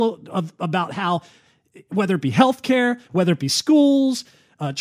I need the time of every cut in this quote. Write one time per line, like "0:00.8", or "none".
none